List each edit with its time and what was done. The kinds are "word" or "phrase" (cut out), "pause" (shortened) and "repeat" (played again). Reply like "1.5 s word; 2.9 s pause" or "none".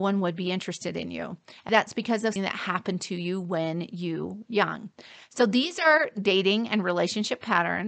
1.7 s word; 2.4 s word; 4.5 s word